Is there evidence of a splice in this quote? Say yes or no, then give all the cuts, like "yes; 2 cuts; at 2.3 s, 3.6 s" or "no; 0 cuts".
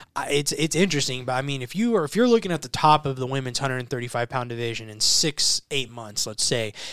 no; 0 cuts